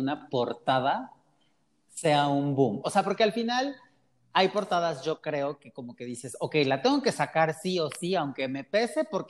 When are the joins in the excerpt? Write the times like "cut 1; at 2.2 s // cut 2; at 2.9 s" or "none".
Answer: none